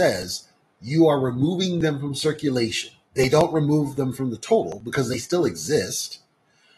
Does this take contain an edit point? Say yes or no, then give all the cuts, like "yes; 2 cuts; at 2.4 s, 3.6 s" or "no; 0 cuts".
yes; 1 cut; at 3.0 s